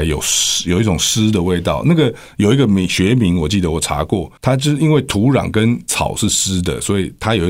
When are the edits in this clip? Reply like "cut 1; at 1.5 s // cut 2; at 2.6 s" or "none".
cut 1; at 4.4 s